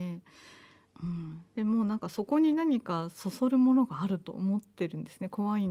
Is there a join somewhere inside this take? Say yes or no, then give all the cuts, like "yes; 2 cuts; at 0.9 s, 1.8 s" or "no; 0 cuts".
no; 0 cuts